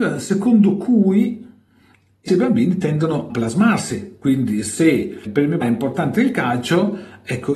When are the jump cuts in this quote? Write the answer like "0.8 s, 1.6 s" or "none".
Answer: 2.3 s, 3.3 s, 5.3 s, 5.6 s